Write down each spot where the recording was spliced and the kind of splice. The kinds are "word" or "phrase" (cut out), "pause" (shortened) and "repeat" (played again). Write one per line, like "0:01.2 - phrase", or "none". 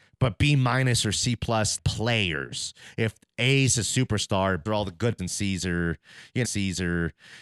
0:01.8 - word
0:04.7 - word
0:05.2 - word
0:06.4 - repeat